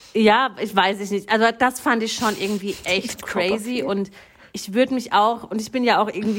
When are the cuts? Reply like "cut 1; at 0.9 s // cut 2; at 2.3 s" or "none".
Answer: none